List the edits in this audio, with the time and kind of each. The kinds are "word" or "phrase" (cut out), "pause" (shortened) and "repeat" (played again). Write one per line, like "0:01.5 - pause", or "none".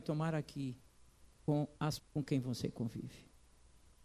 0:02.0 - word